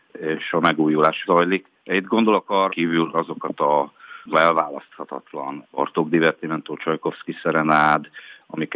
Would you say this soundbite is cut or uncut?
cut